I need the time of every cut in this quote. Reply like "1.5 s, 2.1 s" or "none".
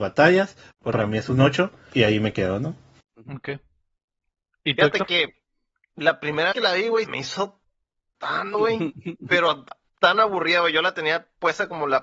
0.9 s, 1.9 s, 6.5 s, 7.0 s, 8.5 s